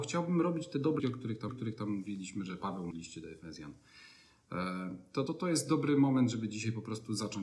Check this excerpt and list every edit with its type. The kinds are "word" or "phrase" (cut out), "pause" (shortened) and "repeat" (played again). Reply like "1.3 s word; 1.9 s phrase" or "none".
1.0 s word; 1.5 s repeat; 2.9 s word; 5.3 s word